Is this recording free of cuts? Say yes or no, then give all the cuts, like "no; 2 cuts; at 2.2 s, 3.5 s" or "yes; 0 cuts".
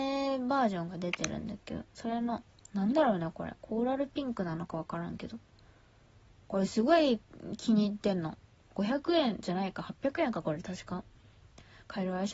yes; 0 cuts